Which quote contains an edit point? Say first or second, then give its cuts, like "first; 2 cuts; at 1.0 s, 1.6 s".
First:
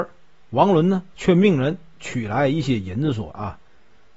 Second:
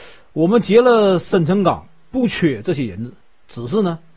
first; 1 cut; at 1.1 s